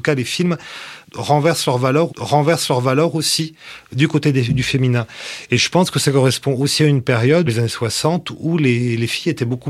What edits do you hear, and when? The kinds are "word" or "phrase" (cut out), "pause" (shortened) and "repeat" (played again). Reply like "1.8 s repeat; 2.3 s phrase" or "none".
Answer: 2.1 s repeat; 7.5 s word